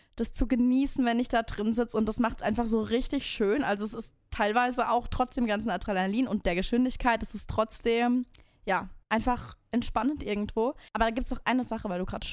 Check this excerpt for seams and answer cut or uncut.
cut